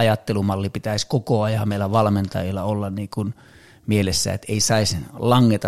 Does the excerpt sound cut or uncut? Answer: uncut